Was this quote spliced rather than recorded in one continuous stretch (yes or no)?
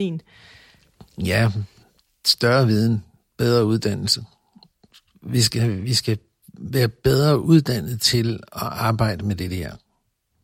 no